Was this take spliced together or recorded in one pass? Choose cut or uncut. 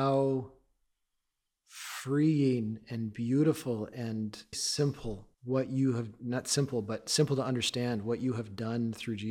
cut